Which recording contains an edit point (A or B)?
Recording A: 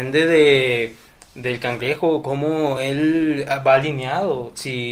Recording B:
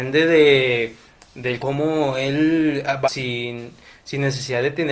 B